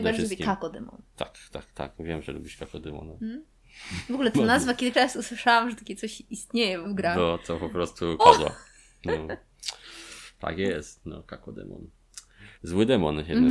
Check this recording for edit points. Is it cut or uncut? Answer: cut